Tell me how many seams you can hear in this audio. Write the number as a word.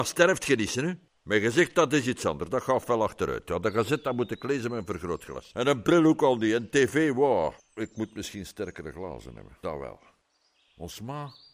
zero